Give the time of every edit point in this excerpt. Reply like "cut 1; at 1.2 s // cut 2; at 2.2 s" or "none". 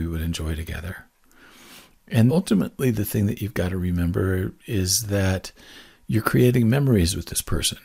cut 1; at 2.3 s

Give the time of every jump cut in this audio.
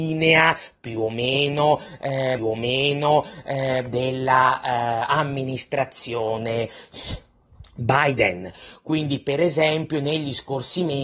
cut 1; at 2.4 s

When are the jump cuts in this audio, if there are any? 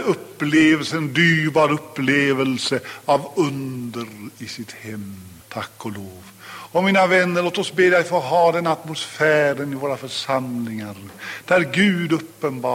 cut 1; at 5.4 s

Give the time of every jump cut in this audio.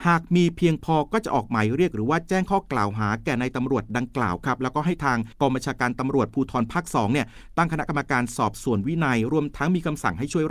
cut 1; at 5.3 s

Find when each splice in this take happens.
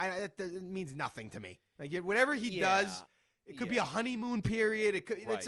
none

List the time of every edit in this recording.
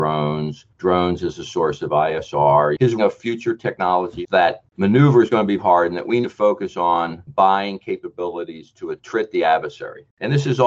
cut 1; at 3.0 s // cut 2; at 4.3 s // cut 3; at 5.6 s // cut 4; at 6.2 s

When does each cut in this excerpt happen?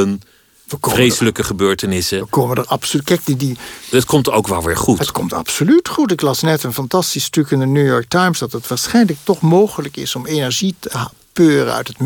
none

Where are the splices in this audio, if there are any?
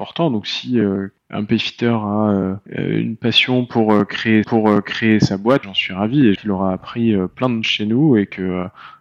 cut 1; at 1.2 s // cut 2; at 2.7 s // cut 3; at 4.4 s // cut 4; at 5.6 s // cut 5; at 6.4 s // cut 6; at 7.6 s

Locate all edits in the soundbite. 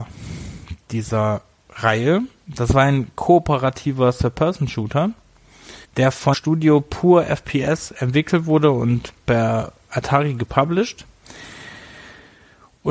cut 1; at 5.8 s // cut 2; at 6.3 s

